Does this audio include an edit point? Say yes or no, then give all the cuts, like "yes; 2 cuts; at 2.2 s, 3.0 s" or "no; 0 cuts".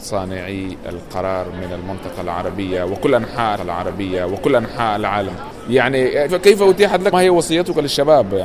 yes; 3 cuts; at 3.6 s, 6.3 s, 7.1 s